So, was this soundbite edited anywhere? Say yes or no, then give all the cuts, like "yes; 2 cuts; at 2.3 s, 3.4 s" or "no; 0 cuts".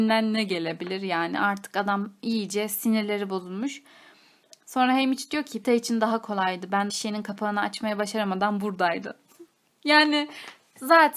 yes; 2 cuts; at 5.6 s, 6.9 s